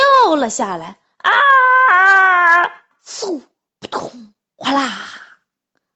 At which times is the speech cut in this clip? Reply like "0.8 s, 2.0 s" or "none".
none